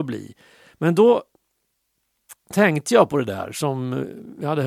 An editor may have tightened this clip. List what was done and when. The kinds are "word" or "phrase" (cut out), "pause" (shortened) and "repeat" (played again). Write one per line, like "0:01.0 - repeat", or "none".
none